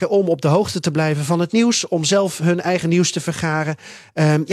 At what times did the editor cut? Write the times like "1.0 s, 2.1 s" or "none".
none